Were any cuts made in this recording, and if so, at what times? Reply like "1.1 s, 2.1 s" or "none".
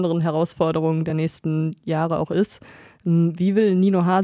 none